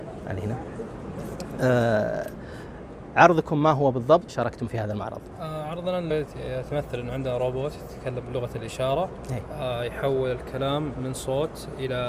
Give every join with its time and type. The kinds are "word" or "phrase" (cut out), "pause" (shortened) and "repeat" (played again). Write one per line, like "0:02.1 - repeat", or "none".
0:04.3 - word
0:05.3 - pause
0:06.1 - word